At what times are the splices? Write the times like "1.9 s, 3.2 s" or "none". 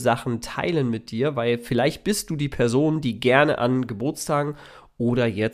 none